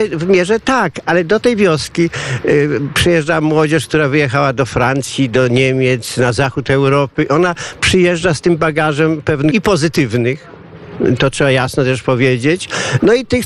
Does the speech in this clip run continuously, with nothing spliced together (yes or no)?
no